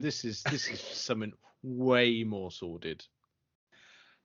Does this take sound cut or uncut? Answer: uncut